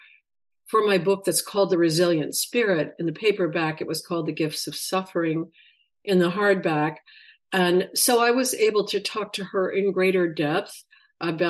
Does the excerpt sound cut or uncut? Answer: uncut